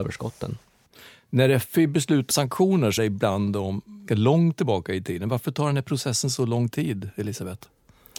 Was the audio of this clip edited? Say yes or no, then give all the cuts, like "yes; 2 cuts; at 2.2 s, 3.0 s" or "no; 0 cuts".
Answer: yes; 3 cuts; at 2.3 s, 3.0 s, 4.1 s